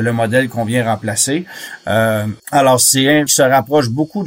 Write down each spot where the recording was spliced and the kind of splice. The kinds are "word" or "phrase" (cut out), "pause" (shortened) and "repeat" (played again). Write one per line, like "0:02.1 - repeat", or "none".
0:02.4 - pause
0:03.3 - word